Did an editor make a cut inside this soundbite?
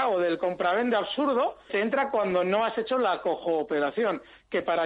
yes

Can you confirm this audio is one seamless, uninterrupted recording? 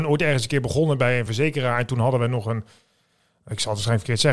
yes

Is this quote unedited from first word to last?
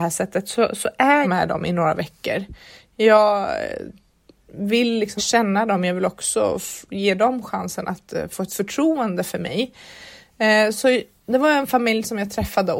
no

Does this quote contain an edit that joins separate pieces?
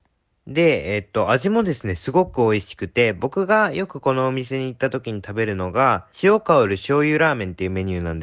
yes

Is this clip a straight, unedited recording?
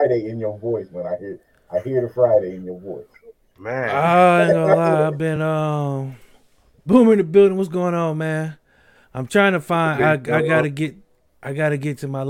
yes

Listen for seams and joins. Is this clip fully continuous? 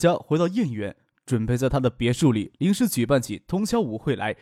yes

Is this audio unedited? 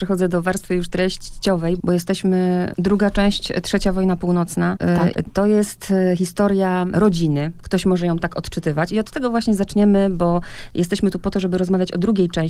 yes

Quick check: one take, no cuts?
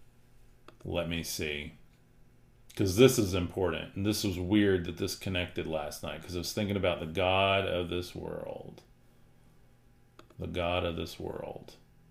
yes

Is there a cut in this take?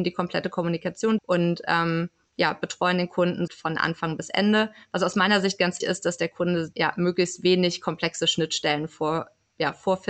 yes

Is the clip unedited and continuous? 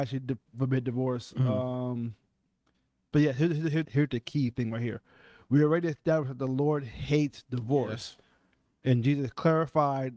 no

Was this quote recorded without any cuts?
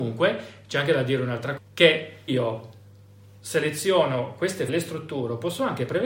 no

